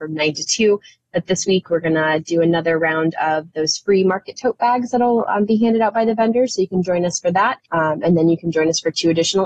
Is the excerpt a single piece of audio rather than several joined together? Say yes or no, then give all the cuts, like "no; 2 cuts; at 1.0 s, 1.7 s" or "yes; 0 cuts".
no; 1 cut; at 7.7 s